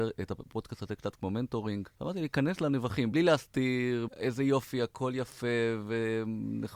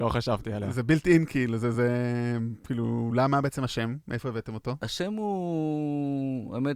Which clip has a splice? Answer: first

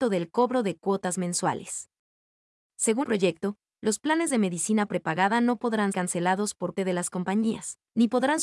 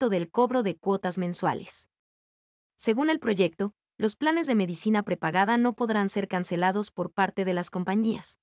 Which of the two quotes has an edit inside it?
first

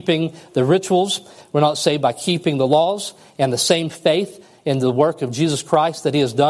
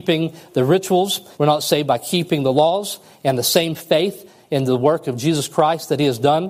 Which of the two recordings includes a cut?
second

